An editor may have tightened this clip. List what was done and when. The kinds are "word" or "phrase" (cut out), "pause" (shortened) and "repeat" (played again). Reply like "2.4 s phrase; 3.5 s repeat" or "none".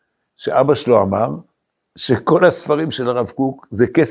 1.7 s pause